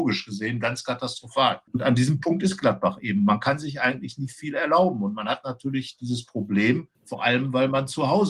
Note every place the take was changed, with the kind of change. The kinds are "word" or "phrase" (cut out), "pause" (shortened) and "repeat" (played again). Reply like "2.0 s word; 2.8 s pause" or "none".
6.9 s pause